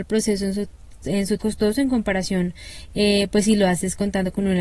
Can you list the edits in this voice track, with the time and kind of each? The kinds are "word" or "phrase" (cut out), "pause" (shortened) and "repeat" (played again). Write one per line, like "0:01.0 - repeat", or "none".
0:01.4 - phrase